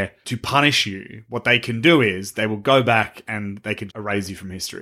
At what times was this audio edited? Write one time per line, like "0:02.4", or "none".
0:03.9